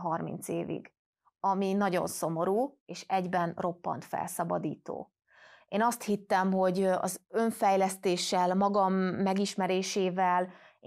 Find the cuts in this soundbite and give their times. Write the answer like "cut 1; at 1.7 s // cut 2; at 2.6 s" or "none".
none